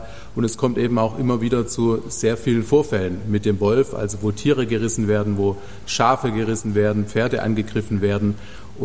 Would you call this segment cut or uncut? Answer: uncut